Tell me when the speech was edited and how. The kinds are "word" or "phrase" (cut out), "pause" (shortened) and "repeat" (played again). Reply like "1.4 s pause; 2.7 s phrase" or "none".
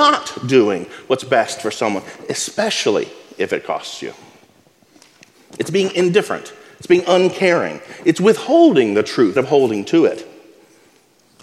9.4 s word